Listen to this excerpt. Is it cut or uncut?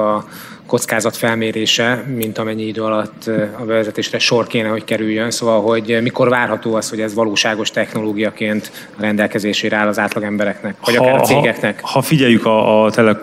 uncut